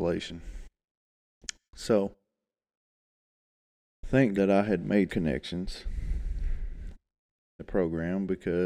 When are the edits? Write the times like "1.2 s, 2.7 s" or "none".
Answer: 4.3 s, 5.1 s, 7.6 s